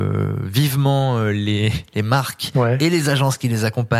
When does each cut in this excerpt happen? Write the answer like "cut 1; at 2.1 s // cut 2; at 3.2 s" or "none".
none